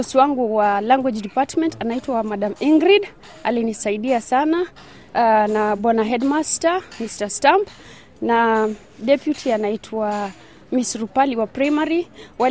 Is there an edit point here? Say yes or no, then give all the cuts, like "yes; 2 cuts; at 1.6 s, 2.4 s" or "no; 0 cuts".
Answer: no; 0 cuts